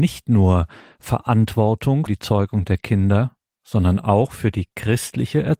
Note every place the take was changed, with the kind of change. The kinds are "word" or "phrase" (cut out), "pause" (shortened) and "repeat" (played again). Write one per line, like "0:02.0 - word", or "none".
0:02.1 - word
0:03.5 - pause